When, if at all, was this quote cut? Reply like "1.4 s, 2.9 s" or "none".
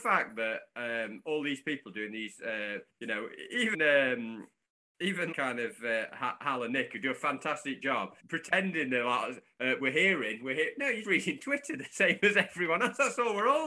2.9 s, 3.7 s, 5.3 s, 8.2 s, 11.0 s

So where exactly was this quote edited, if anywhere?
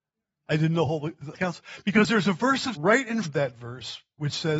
1.3 s, 2.7 s, 3.2 s

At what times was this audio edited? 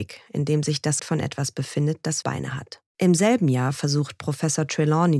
1.0 s, 2.2 s, 2.9 s

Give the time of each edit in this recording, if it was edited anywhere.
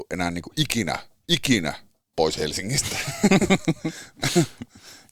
2.1 s

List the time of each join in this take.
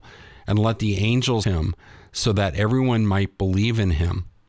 1.4 s

